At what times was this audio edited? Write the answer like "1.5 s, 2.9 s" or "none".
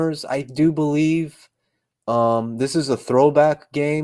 none